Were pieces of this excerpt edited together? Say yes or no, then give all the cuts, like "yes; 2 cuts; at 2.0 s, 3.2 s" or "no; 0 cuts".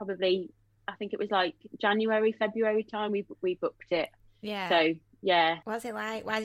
no; 0 cuts